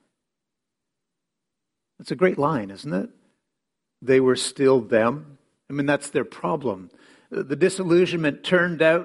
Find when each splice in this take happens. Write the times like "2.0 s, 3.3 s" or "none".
none